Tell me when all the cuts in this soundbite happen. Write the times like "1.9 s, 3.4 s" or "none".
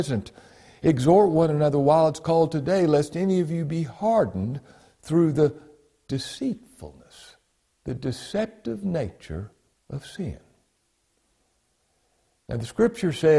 7.5 s, 9.7 s

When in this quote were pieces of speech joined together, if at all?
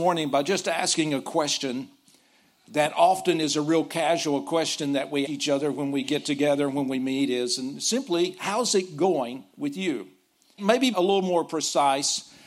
5.3 s, 10.6 s, 10.9 s

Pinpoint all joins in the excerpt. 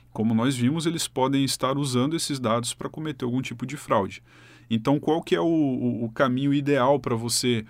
none

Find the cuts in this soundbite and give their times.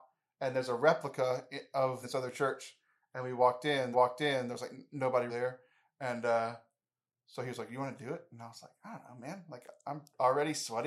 2.0 s, 3.9 s, 5.3 s

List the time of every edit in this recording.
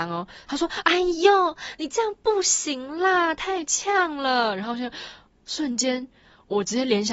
none

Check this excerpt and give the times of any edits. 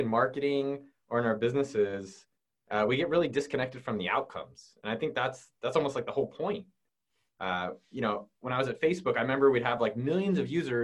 none

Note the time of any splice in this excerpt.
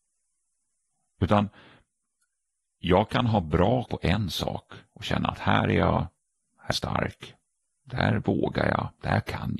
3.9 s, 6.7 s

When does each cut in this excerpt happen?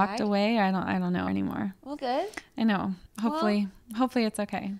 1.3 s, 2.0 s, 3.1 s

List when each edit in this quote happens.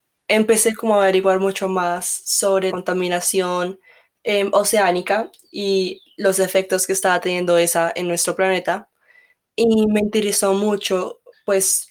2.7 s

